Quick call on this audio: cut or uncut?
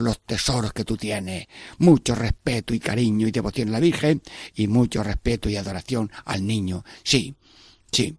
uncut